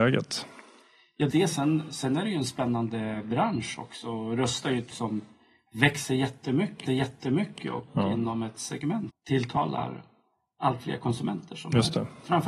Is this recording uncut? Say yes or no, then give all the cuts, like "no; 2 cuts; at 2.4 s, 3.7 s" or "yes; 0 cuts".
no; 4 cuts; at 1.3 s, 4.9 s, 6.9 s, 9.1 s